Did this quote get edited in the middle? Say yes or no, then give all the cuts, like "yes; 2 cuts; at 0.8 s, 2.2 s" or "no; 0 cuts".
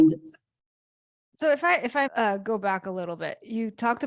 yes; 1 cut; at 2.1 s